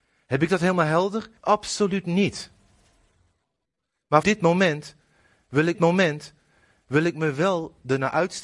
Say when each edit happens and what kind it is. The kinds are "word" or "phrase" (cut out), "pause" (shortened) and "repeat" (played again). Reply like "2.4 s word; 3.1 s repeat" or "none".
1.4 s pause; 4.2 s word; 5.7 s repeat